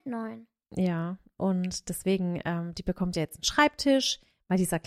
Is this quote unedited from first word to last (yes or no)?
yes